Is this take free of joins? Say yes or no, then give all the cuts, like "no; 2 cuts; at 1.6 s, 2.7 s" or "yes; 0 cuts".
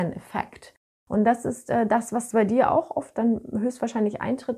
yes; 0 cuts